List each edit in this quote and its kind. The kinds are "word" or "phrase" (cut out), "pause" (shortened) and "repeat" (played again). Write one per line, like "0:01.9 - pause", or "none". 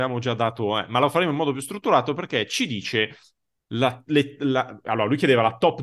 none